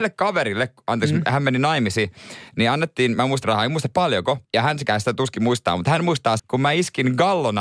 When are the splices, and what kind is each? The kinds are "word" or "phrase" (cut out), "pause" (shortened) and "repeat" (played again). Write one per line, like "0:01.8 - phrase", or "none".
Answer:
0:03.4 - word
0:04.4 - pause
0:06.4 - word